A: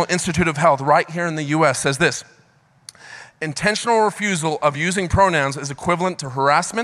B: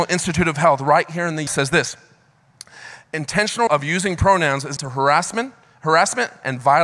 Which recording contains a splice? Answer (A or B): B